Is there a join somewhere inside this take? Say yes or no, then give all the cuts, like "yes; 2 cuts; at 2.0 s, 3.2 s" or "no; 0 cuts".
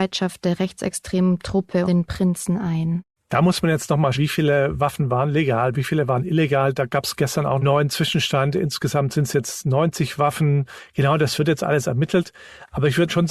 yes; 4 cuts; at 1.8 s, 3.1 s, 4.1 s, 7.6 s